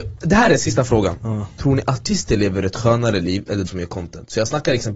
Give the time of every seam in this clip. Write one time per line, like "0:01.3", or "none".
0:03.7